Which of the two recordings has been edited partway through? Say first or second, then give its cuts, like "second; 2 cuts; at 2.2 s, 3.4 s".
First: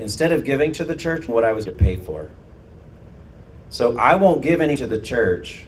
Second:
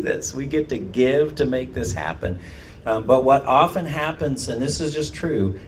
first; 3 cuts; at 1.3 s, 1.7 s, 4.8 s